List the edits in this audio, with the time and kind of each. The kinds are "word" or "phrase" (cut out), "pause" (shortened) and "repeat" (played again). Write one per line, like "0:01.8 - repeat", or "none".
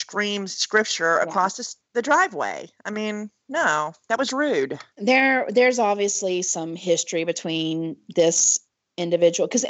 0:01.8 - pause
0:04.9 - pause